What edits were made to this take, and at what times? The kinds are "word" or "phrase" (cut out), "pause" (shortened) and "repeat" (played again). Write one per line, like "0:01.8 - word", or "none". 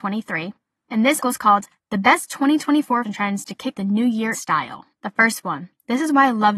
0:01.2 - word
0:03.0 - word
0:03.7 - word
0:04.3 - word